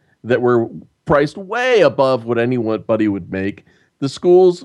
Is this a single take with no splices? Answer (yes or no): yes